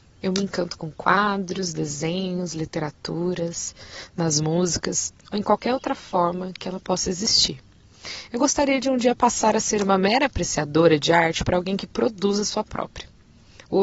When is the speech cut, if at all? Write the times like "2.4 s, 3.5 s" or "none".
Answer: none